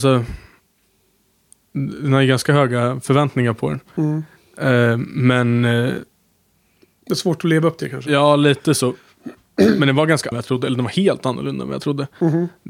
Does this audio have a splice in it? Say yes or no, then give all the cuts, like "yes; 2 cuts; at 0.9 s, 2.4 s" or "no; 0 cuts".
yes; 1 cut; at 10.3 s